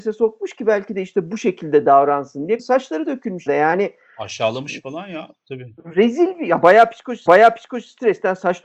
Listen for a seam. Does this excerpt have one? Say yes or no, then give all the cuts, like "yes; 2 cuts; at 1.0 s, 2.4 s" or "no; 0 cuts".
yes; 3 cuts; at 2.6 s, 3.5 s, 7.3 s